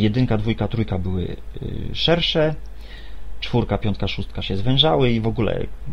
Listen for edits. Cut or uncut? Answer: uncut